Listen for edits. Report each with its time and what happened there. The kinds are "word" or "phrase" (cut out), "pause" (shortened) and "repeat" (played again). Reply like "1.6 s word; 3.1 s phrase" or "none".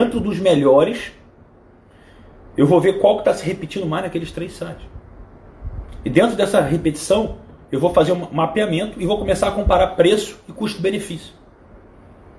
none